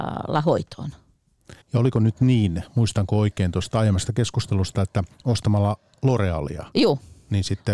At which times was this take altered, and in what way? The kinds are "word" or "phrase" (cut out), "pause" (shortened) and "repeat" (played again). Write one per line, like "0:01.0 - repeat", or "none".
0:01.6 - pause
0:05.1 - pause